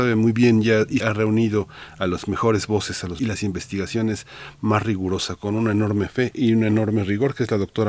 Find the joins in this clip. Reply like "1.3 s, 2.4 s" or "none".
1.0 s, 3.2 s

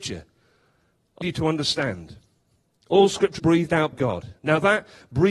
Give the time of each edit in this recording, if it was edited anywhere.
1.2 s, 3.4 s, 3.9 s

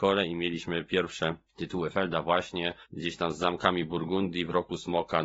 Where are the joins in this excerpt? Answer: 1.5 s, 2.8 s

